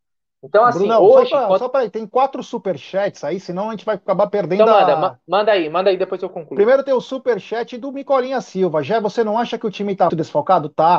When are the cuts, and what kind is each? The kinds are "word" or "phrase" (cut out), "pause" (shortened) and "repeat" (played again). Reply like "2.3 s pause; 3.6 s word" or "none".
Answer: 10.1 s word